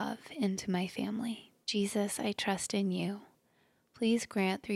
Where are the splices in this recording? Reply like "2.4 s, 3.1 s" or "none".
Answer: 1.6 s